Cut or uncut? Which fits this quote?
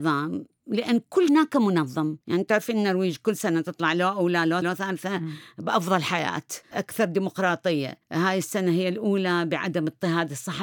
cut